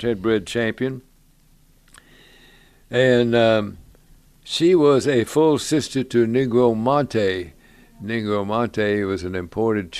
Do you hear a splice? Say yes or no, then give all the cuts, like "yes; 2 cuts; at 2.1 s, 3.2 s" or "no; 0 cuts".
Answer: no; 0 cuts